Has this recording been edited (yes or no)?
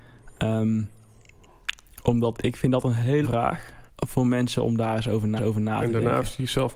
yes